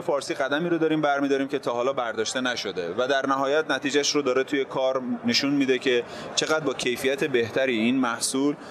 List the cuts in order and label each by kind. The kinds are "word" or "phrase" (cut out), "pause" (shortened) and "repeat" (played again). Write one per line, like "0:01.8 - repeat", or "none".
none